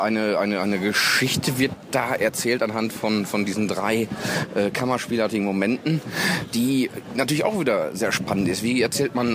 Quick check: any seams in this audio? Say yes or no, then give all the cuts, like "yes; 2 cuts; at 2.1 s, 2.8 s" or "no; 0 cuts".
no; 0 cuts